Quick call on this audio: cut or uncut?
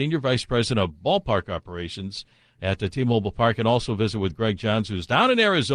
uncut